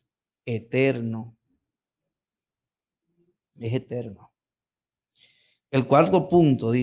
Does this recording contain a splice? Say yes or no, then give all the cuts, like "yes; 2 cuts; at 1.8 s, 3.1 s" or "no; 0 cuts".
no; 0 cuts